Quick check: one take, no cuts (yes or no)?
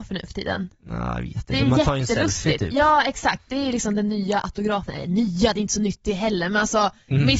yes